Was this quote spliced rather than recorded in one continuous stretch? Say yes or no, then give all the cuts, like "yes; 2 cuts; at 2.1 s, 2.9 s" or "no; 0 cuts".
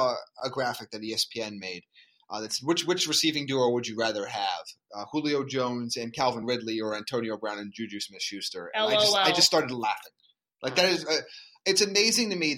no; 0 cuts